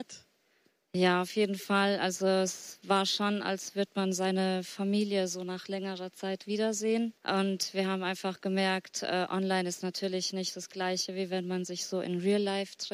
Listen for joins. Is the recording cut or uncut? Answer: cut